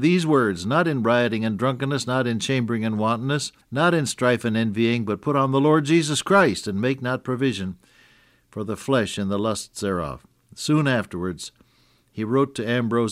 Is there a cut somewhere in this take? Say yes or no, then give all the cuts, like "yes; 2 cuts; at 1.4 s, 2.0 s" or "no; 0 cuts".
yes; 1 cut; at 3.6 s